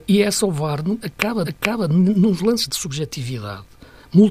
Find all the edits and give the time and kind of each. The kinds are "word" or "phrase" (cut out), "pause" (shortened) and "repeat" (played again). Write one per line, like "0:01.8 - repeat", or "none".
0:01.4 - repeat